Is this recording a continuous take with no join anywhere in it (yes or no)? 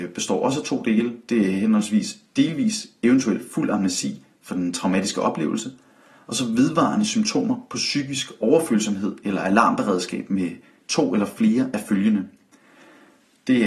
yes